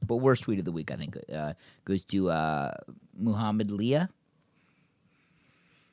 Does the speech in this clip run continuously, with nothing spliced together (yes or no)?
yes